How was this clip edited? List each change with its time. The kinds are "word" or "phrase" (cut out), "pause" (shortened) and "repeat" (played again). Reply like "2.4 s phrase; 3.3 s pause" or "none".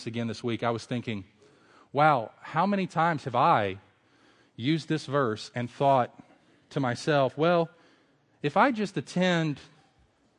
none